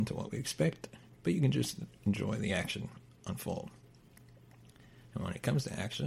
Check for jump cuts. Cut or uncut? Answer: uncut